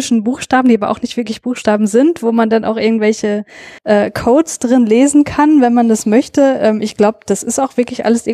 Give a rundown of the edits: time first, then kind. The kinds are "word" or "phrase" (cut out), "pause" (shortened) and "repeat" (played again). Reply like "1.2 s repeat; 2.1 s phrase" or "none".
3.8 s pause